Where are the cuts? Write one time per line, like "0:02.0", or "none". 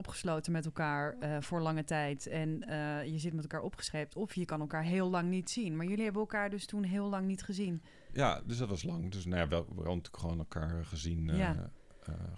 none